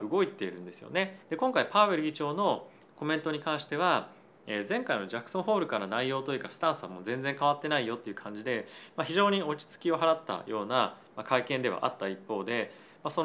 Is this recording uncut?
no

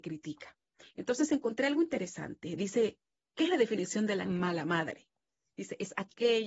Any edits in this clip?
yes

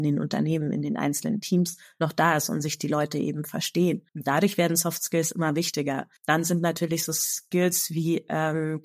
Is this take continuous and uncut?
no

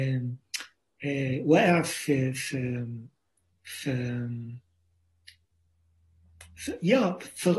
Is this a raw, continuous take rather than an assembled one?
yes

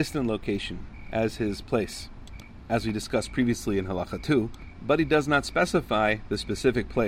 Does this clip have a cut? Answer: no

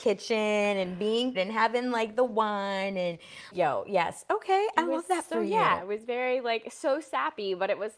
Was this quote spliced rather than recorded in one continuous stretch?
yes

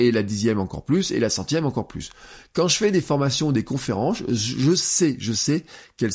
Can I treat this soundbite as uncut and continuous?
yes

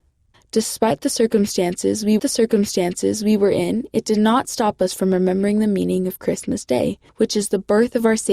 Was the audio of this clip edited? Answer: yes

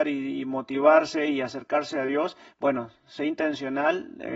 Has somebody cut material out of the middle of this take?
no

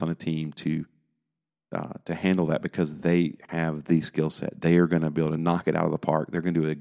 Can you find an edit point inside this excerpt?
no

